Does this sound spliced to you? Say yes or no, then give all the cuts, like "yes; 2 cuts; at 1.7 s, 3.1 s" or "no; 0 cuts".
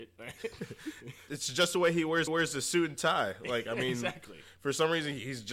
yes; 2 cuts; at 1.3 s, 2.3 s